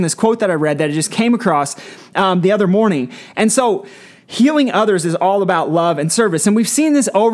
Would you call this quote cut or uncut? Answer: uncut